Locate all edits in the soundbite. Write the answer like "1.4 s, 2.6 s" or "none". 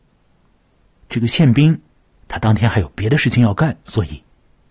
none